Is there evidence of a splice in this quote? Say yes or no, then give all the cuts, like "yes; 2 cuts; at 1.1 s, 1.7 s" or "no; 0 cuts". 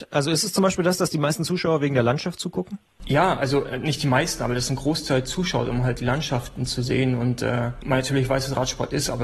no; 0 cuts